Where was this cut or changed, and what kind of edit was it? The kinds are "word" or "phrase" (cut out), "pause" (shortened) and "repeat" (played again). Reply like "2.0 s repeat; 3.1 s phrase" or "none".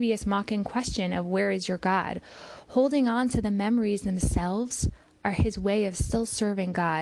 none